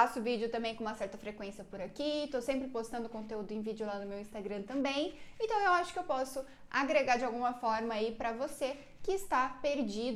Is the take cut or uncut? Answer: uncut